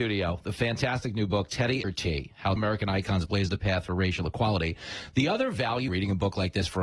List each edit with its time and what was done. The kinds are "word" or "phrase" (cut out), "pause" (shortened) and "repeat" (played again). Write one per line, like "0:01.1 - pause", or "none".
0:01.8 - phrase
0:02.6 - word
0:05.9 - word